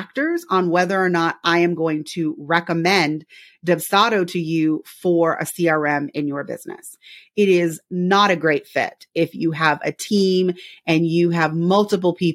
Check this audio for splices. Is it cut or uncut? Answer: uncut